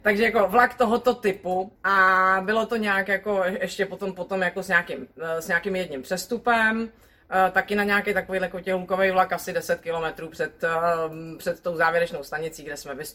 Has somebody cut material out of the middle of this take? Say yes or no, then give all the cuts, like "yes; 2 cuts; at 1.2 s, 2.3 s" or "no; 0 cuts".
yes; 1 cut; at 1.8 s